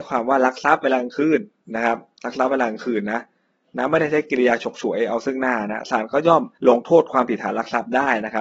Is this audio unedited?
no; 1 cut; at 6.6 s

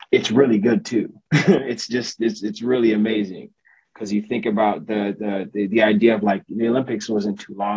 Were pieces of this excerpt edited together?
no; 0 cuts

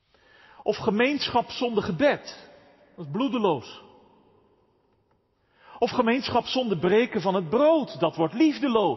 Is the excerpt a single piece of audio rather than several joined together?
yes; 0 cuts

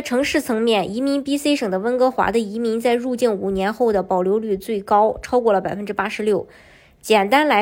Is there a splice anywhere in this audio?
no; 0 cuts

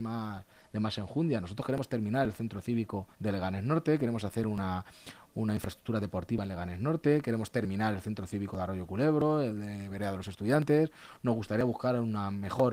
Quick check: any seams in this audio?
yes; 1 cut; at 3.1 s

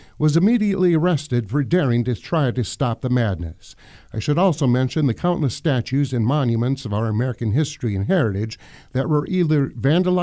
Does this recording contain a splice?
no; 0 cuts

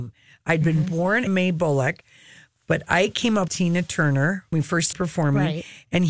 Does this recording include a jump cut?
yes; 4 cuts; at 1.3 s, 3.5 s, 4.5 s, 4.9 s

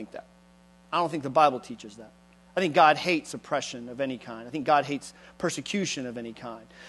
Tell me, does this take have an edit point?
no; 0 cuts

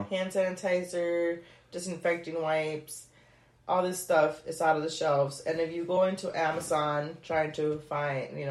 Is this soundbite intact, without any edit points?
yes; 0 cuts

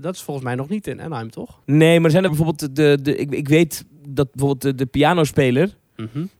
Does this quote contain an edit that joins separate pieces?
yes; 2 cuts; at 1.6 s, 2.3 s

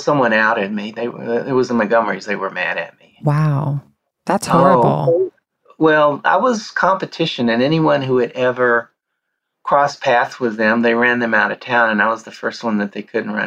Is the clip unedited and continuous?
yes; 0 cuts

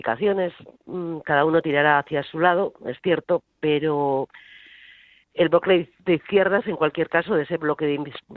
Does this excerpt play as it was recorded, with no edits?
yes; 0 cuts

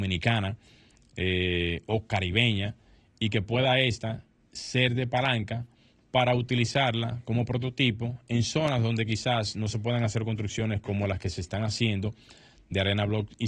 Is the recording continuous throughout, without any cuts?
yes; 0 cuts

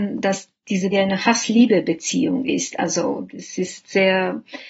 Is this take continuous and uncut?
no; 1 cut; at 0.9 s

